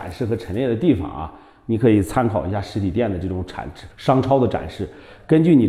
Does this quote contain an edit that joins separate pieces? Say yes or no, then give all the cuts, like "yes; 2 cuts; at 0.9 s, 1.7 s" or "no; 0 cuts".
yes; 1 cut; at 3.9 s